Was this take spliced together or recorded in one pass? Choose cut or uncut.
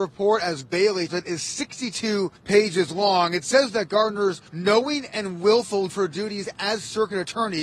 cut